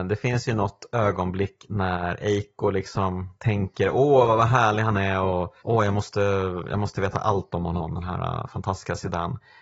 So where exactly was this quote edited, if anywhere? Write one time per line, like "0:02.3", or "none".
0:03.3
0:05.6